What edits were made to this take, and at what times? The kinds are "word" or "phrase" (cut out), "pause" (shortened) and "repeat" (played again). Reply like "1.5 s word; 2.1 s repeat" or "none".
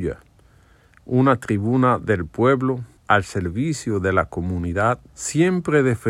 3.0 s pause; 5.1 s pause